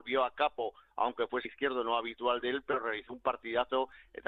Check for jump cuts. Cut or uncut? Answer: cut